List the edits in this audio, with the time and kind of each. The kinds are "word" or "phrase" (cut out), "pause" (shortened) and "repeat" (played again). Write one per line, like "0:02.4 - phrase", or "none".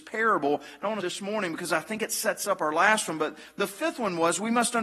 0:01.0 - phrase